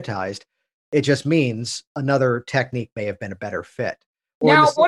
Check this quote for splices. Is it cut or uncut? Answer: uncut